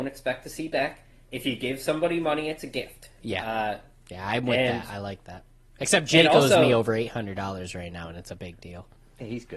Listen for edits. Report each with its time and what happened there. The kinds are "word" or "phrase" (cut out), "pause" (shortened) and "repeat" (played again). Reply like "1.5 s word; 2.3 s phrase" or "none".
none